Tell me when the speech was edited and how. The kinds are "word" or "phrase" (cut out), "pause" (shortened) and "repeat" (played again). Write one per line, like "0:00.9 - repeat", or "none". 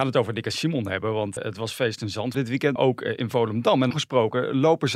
0:01.4 - word
0:02.3 - word
0:02.8 - word
0:03.9 - word